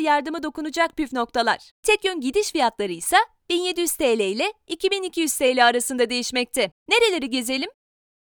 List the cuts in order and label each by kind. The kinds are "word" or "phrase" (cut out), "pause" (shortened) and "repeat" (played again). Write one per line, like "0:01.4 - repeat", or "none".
0:01.8 - pause
0:06.8 - pause